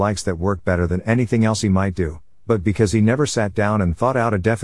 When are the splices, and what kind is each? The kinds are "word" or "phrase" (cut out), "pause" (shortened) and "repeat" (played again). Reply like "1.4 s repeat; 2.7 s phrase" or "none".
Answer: none